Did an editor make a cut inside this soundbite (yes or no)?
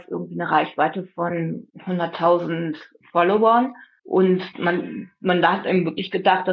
no